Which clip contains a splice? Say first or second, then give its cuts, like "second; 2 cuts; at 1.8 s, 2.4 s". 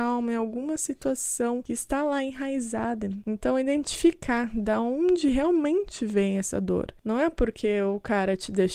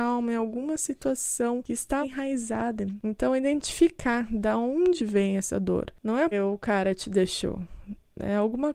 second; 3 cuts; at 2.0 s, 5.0 s, 6.3 s